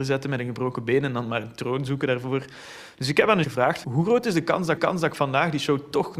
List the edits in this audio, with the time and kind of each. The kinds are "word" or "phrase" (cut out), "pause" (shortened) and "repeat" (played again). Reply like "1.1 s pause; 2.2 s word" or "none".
3.4 s word; 3.8 s word; 4.8 s repeat